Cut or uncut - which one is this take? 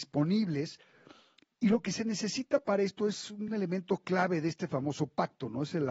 uncut